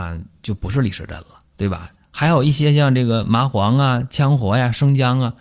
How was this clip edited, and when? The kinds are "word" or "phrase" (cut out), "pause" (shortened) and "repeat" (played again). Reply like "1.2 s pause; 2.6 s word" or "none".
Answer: none